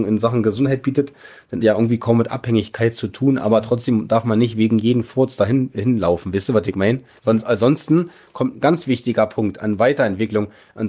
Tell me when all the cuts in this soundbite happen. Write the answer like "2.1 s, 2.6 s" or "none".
1.6 s